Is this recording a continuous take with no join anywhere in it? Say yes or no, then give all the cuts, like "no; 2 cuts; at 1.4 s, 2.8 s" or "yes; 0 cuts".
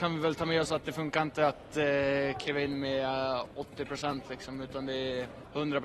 yes; 0 cuts